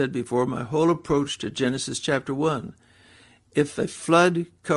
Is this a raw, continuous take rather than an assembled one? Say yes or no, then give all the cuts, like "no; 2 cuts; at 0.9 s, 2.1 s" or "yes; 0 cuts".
yes; 0 cuts